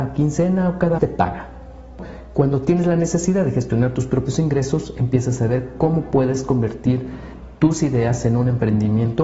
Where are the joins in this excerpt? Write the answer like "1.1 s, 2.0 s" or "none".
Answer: 1.0 s